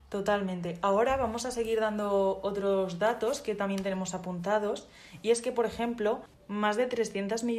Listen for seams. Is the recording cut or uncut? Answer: uncut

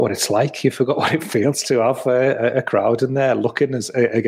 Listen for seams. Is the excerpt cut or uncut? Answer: cut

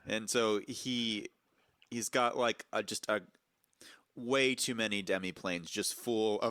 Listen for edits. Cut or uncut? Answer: uncut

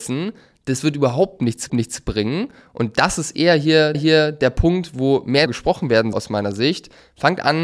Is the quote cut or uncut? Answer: cut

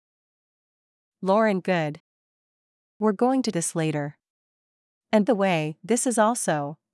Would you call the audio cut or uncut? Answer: cut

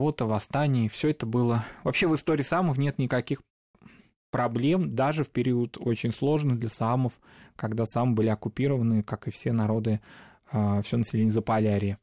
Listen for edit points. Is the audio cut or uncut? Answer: uncut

